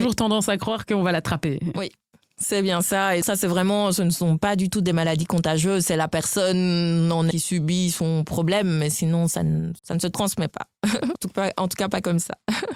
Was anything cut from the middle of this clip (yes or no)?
yes